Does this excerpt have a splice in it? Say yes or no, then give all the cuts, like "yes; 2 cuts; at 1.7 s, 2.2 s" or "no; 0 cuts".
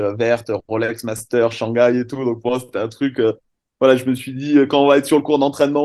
no; 0 cuts